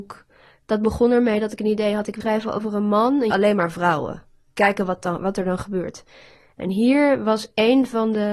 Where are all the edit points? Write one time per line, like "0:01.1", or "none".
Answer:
0:02.2
0:03.3